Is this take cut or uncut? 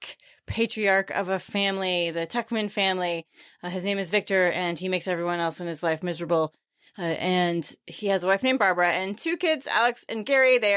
uncut